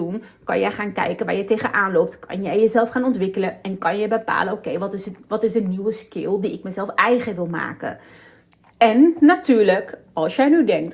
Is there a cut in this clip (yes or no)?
no